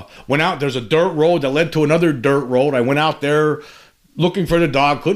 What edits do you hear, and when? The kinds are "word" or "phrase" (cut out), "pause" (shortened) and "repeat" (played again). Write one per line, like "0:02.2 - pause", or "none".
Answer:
none